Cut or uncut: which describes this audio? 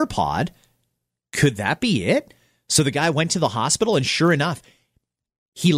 uncut